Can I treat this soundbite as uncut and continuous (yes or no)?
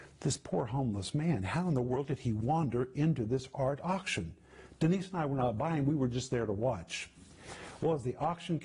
yes